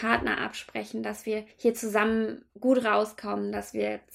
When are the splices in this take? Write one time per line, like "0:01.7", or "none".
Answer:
0:01.5
0:02.5